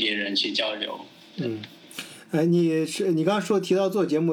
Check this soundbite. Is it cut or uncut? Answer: uncut